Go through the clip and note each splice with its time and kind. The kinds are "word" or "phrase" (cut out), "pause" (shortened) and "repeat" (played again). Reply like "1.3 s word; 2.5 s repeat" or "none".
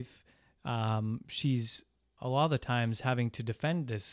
2.2 s word